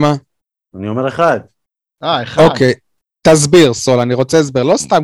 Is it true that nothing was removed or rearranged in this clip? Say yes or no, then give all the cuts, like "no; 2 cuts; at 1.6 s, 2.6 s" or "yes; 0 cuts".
yes; 0 cuts